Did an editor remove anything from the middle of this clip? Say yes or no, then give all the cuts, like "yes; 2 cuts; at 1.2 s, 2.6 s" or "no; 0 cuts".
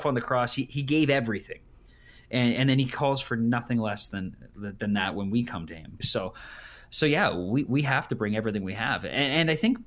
yes; 1 cut; at 6.0 s